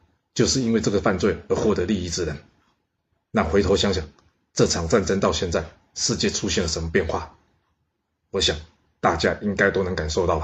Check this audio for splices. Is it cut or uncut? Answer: uncut